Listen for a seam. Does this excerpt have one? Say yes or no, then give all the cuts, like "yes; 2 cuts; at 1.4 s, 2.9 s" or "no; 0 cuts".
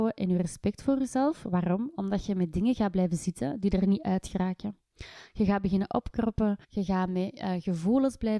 yes; 1 cut; at 6.6 s